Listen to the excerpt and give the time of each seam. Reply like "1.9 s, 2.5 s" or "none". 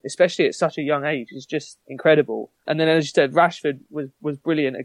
1.8 s